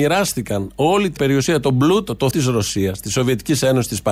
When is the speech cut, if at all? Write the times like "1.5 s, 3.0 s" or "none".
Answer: 1.2 s, 2.3 s